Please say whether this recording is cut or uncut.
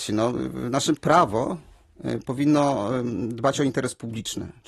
cut